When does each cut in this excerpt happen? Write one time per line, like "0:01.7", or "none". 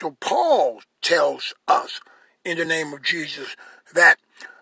none